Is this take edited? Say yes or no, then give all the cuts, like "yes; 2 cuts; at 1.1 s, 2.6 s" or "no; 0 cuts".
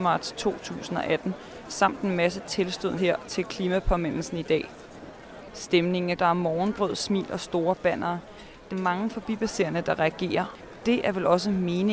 yes; 4 cuts; at 3.0 s, 6.2 s, 8.7 s, 10.8 s